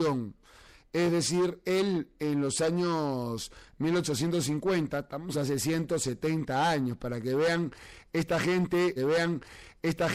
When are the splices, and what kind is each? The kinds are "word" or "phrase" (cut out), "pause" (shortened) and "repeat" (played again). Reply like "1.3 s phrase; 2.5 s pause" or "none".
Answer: 5.3 s word; 9.0 s repeat